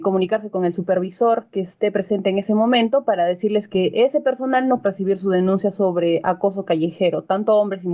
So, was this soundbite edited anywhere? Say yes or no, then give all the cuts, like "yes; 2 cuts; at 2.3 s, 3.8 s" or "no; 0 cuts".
yes; 1 cut; at 4.8 s